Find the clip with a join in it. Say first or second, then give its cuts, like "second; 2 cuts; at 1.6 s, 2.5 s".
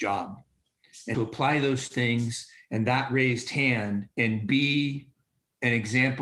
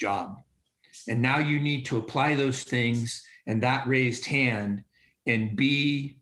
first; 2 cuts; at 1.1 s, 4.1 s